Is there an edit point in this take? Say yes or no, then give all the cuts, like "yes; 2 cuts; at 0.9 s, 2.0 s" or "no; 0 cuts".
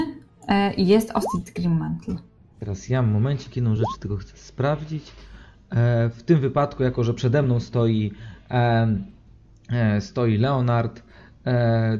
no; 0 cuts